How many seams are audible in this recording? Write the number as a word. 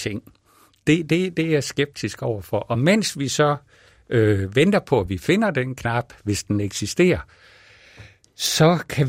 zero